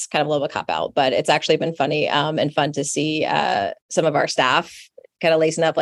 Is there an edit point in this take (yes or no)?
yes